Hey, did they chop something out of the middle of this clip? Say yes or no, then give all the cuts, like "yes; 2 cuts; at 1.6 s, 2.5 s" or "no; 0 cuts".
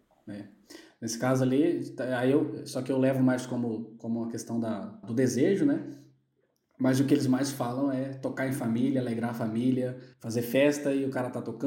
yes; 2 cuts; at 5.0 s, 10.1 s